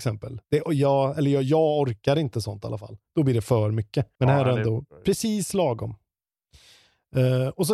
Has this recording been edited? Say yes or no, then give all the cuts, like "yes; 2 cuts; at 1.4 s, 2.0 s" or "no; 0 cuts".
yes; 1 cut; at 4.1 s